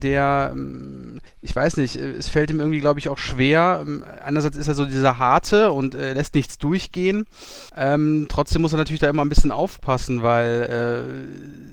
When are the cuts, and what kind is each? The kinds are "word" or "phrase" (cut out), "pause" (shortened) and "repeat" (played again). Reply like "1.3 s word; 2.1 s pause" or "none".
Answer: 1.3 s pause; 7.7 s pause